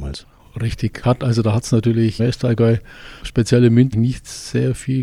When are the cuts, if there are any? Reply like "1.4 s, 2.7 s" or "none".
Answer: 1.0 s, 2.2 s, 3.2 s, 3.9 s